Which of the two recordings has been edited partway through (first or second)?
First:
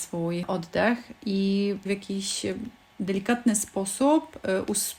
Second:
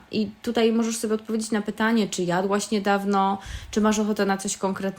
first